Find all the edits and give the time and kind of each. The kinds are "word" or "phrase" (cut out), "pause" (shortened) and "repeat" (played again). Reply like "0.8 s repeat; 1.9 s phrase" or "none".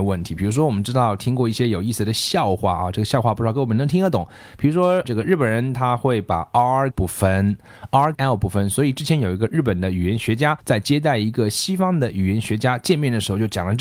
5.0 s word; 6.9 s phrase; 8.1 s word; 10.6 s pause